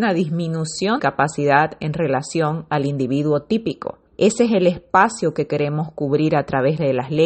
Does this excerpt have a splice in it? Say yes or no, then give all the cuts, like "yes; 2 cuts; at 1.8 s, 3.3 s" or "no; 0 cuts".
yes; 2 cuts; at 1.0 s, 4.1 s